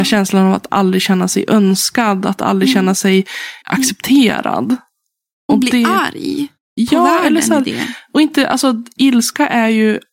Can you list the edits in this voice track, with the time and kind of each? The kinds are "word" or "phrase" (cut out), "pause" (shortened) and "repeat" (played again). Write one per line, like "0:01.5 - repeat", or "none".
0:03.6 - pause